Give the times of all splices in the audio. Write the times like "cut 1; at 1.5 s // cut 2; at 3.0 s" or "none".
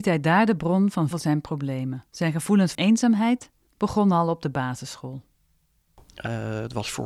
cut 1; at 1.1 s // cut 2; at 2.1 s // cut 3; at 2.7 s // cut 4; at 3.7 s // cut 5; at 6.1 s